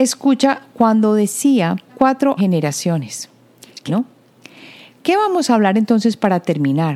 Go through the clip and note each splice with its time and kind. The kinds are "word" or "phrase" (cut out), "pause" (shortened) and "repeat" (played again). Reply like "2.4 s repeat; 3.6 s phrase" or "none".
1.9 s phrase; 2.4 s phrase; 3.9 s word